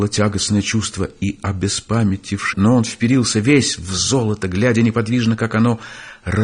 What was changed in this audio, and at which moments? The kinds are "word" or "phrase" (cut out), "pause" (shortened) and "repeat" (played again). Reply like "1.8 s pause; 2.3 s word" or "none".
2.5 s phrase